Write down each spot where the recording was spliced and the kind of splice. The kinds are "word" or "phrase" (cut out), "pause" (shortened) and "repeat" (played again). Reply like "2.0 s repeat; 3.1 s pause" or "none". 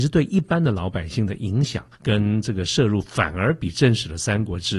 1.9 s pause

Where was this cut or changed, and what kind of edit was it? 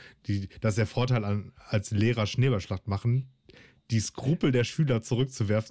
none

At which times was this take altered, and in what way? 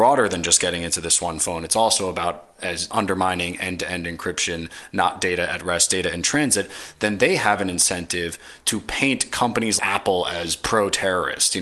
2.9 s word; 9.8 s word

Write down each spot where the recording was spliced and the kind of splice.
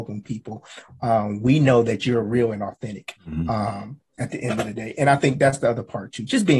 3.2 s pause

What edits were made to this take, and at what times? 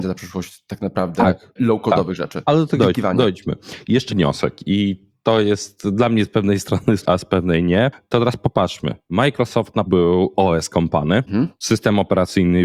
2.8 s word; 4.1 s word; 7.0 s word; 9.9 s word; 11.3 s word

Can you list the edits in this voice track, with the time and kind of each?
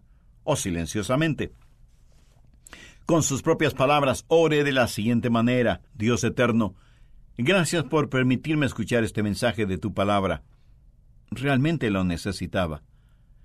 5.9 s pause

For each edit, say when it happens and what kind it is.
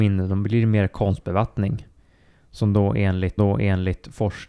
3.4 s repeat

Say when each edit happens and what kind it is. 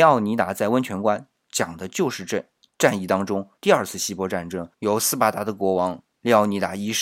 2.6 s pause; 3.6 s pause; 4.7 s pause

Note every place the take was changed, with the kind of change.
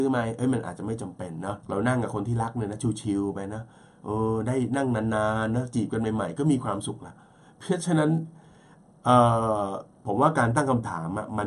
1.6 s pause

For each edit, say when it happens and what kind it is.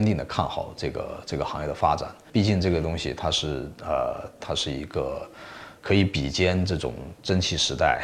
4.4 s phrase; 5.8 s pause

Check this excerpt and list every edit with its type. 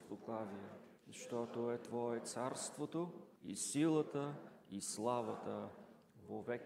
1.0 s pause; 3.4 s pause

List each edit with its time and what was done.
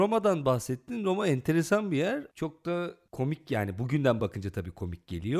none

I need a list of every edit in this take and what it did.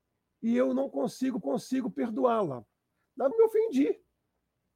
1.4 s repeat; 3.3 s phrase

